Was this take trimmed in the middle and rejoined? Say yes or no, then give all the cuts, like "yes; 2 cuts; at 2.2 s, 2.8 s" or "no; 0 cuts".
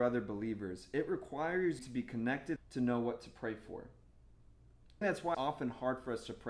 yes; 4 cuts; at 1.8 s, 2.6 s, 5.0 s, 5.3 s